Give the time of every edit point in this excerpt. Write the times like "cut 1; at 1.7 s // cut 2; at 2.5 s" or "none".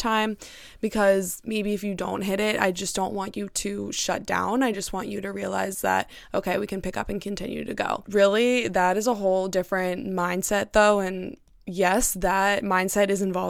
none